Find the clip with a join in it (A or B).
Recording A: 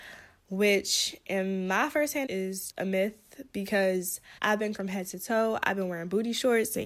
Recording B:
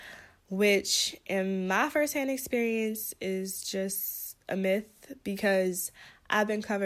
A